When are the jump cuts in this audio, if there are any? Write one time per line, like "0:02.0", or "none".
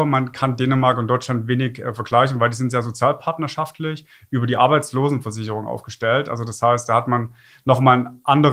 none